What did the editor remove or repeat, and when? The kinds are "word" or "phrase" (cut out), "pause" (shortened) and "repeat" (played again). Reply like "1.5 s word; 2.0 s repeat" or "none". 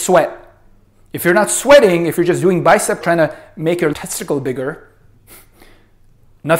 3.0 s word; 3.9 s word